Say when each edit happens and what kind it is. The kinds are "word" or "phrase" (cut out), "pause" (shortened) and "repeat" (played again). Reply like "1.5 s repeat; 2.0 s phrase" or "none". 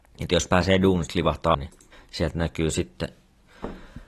1.5 s word; 1.9 s pause